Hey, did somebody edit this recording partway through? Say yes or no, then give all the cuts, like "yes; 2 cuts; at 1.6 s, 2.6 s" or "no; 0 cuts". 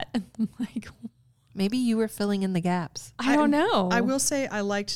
no; 0 cuts